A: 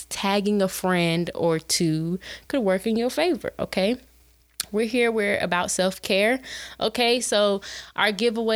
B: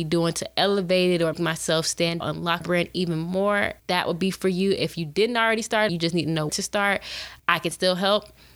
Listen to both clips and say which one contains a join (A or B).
B